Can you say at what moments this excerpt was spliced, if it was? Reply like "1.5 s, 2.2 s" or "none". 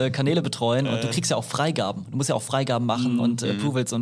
none

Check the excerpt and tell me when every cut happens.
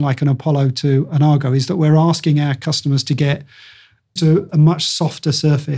4.2 s

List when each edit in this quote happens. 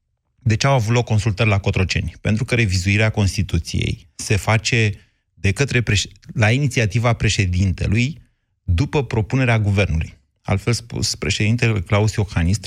none

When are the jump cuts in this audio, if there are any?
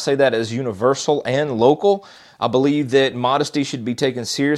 none

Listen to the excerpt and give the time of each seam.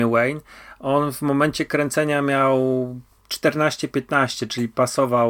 none

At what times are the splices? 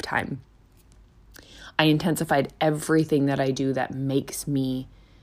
none

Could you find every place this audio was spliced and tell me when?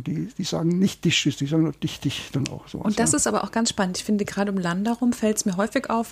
none

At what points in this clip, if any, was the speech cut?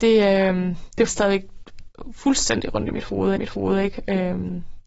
1.1 s, 3.4 s

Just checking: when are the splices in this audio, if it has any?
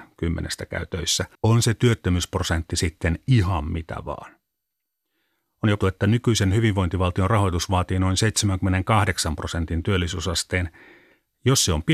1.3 s, 5.8 s

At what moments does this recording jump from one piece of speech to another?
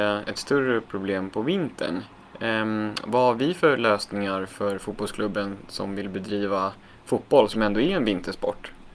2.3 s

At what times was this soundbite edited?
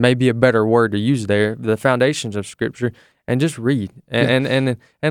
none

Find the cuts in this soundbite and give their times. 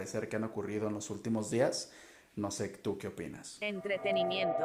none

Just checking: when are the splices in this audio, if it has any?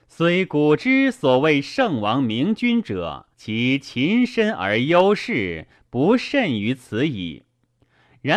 3.3 s

